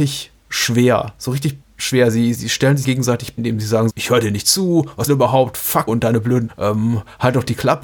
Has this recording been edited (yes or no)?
yes